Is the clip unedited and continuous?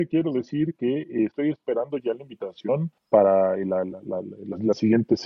no; 1 cut; at 3.0 s

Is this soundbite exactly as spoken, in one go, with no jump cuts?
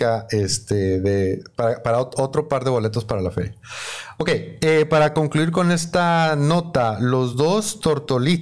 yes; 0 cuts

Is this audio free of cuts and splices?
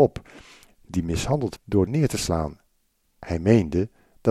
no; 2 cuts; at 1.6 s, 1.9 s

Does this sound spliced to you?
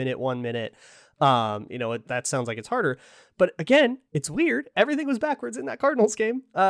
yes; 2 cuts; at 2.0 s, 4.1 s

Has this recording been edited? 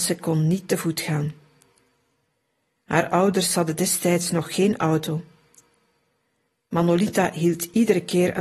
no; 0 cuts

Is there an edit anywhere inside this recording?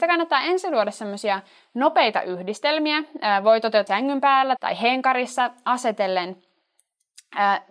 yes; 2 cuts; at 3.9 s, 4.6 s

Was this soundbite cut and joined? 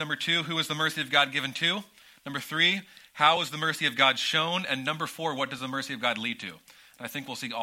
no; 0 cuts

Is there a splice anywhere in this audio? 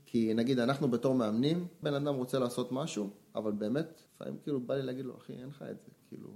yes; 2 cuts; at 1.8 s, 4.1 s

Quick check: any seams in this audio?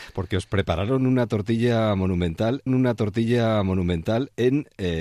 yes; 1 cut; at 2.7 s

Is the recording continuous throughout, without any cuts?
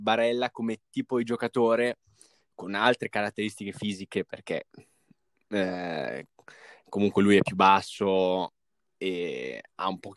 yes; 0 cuts

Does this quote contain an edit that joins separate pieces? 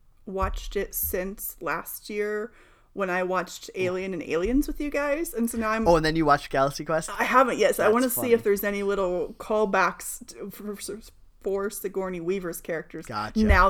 no; 0 cuts

